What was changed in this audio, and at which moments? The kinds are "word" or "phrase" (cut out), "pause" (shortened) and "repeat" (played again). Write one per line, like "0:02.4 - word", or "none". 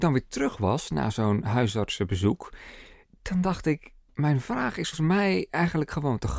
0:04.9 - word